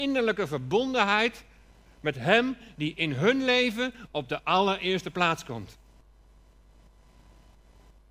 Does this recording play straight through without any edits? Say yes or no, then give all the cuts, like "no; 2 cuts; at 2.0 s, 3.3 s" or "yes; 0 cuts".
yes; 0 cuts